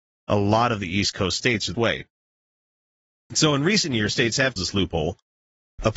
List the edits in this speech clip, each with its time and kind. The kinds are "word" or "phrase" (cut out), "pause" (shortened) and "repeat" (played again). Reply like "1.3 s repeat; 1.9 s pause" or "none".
1.7 s word; 4.1 s word; 4.6 s word